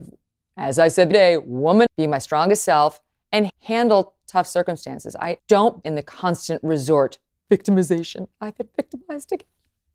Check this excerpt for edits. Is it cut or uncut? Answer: cut